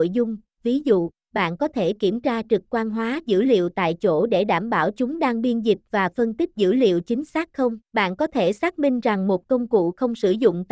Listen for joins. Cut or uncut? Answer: cut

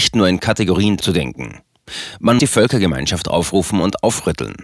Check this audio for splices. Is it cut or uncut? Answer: cut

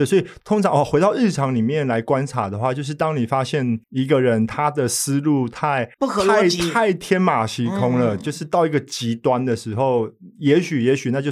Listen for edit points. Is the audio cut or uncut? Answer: cut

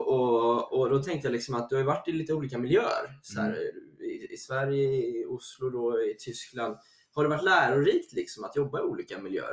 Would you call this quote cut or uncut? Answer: uncut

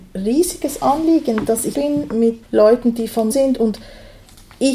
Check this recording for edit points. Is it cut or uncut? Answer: cut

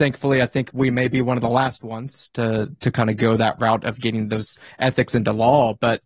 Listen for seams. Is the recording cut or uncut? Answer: uncut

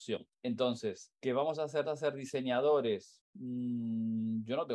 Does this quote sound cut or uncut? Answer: cut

